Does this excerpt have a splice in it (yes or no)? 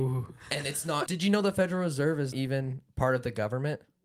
yes